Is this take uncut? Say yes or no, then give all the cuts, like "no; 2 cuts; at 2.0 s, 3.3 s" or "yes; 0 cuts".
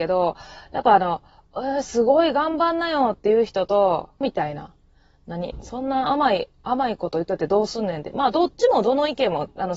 no; 2 cuts; at 1.5 s, 4.2 s